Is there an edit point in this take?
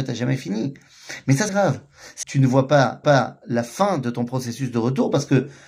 yes; 3 cuts; at 1.5 s, 2.2 s, 3.0 s

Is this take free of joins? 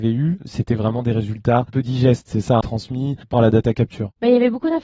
no; 3 cuts; at 1.7 s, 2.6 s, 3.3 s

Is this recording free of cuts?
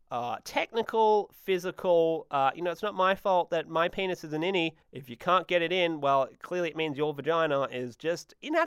no; 1 cut; at 4.8 s

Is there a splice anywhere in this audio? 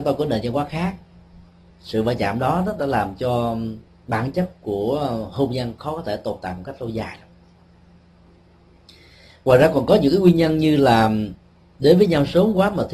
no; 0 cuts

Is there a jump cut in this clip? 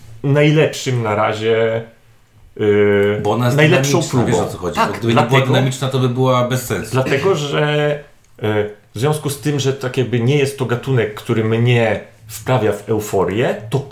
no; 0 cuts

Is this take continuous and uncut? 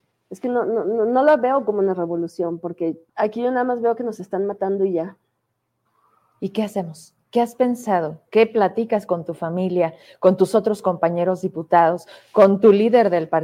no; 3 cuts; at 3.1 s, 5.9 s, 7.2 s

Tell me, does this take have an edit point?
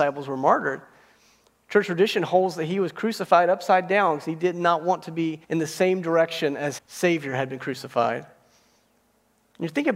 yes; 2 cuts; at 5.4 s, 6.8 s

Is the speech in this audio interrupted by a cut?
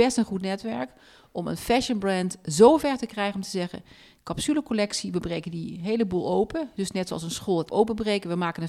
yes; 1 cut; at 7.7 s

